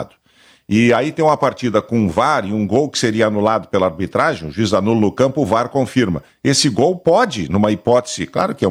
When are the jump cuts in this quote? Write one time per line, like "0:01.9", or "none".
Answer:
none